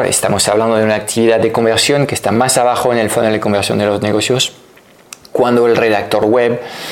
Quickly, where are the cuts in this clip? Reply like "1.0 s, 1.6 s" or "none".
none